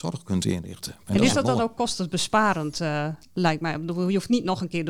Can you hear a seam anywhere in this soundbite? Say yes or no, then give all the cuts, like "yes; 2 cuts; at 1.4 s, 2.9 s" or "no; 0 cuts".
no; 0 cuts